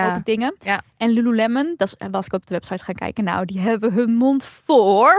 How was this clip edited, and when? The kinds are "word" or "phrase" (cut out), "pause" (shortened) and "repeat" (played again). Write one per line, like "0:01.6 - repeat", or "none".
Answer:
0:02.4 - word